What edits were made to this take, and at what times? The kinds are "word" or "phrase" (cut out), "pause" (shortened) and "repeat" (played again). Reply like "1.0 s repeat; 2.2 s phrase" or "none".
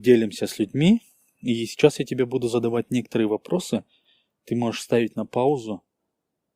none